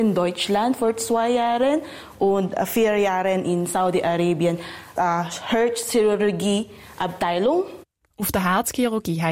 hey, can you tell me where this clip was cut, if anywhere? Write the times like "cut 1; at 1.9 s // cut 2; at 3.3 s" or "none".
cut 1; at 5.0 s